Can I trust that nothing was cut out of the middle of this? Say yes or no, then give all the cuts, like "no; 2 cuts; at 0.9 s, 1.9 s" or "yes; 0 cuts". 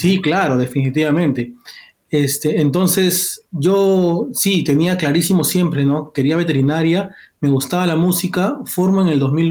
yes; 0 cuts